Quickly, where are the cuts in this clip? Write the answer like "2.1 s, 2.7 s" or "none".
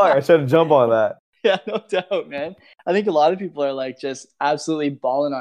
none